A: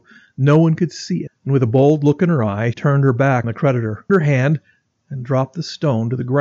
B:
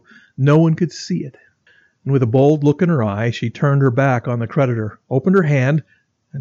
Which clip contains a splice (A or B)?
A